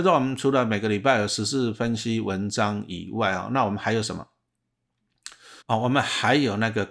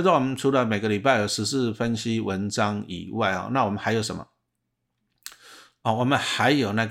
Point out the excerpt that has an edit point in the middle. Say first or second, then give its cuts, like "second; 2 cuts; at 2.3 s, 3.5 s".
first; 1 cut; at 5.6 s